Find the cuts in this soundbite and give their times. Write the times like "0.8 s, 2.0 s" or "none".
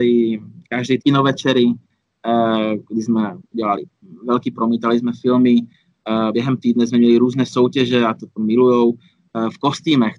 1.0 s, 3.4 s, 4.5 s, 6.3 s